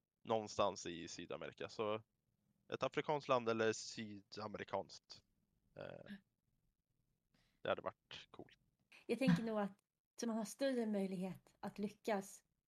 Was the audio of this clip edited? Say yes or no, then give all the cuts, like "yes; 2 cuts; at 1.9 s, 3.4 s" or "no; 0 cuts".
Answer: yes; 1 cut; at 10.2 s